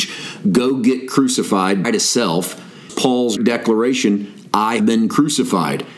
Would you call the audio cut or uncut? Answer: cut